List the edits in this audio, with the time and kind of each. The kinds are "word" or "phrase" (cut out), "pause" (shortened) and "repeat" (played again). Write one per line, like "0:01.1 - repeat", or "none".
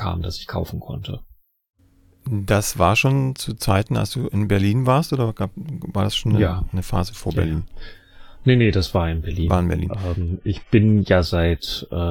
none